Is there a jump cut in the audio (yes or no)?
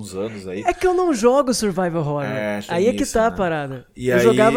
no